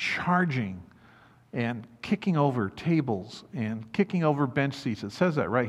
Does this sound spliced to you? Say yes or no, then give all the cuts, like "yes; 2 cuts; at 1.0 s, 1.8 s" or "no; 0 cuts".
no; 0 cuts